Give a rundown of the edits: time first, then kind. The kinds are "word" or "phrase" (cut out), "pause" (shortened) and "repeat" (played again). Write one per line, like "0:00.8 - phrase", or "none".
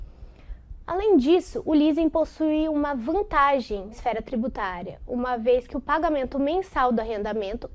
0:03.9 - word